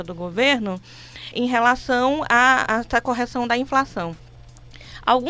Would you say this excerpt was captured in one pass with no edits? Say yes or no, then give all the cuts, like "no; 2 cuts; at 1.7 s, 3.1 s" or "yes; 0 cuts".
no; 1 cut; at 1.3 s